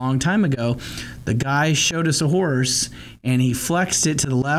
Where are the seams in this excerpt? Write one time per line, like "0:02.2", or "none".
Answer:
none